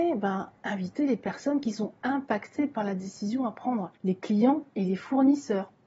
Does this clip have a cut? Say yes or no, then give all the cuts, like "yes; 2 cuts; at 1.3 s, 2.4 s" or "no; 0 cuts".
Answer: yes; 1 cut; at 4.0 s